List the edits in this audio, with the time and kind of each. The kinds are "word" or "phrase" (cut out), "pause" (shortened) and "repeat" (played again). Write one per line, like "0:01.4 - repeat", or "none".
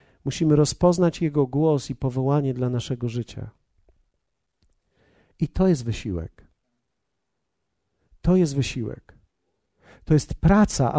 none